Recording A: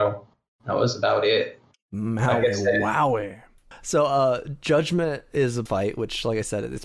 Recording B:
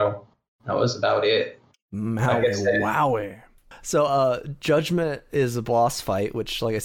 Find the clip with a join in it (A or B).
A